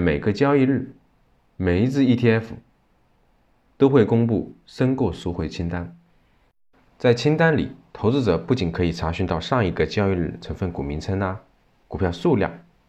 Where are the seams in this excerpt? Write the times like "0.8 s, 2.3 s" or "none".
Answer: none